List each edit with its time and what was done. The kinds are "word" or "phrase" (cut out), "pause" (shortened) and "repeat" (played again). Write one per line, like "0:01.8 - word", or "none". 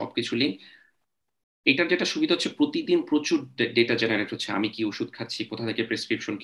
none